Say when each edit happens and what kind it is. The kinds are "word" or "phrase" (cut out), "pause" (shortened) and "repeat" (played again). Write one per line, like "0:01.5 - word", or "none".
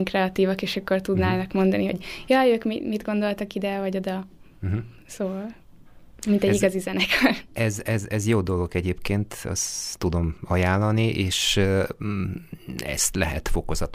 none